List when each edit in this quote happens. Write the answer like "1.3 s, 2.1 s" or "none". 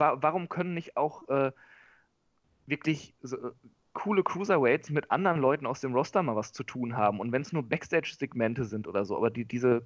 none